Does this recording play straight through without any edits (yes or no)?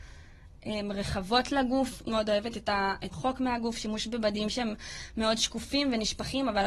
no